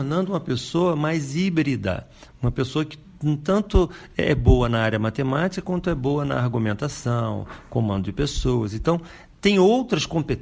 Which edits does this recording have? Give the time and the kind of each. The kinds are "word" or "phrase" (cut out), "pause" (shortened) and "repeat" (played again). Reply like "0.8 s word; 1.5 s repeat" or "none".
none